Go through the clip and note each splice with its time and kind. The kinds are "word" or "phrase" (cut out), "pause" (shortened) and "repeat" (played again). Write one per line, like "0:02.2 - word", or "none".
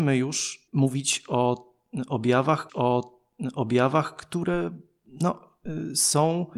0:02.7 - repeat